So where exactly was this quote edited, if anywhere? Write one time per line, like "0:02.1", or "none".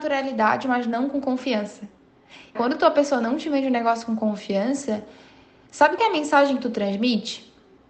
0:02.6
0:06.0